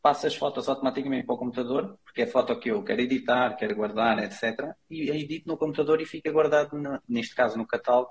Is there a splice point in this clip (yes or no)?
no